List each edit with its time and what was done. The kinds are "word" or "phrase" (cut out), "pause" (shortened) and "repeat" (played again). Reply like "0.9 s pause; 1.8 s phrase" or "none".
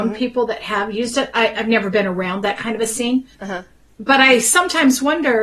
3.3 s pause